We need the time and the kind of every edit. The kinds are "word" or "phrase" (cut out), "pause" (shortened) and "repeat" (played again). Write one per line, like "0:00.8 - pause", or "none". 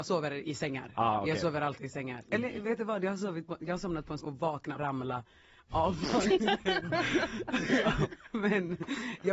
0:04.2 - word
0:04.7 - phrase